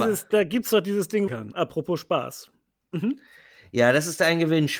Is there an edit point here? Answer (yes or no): yes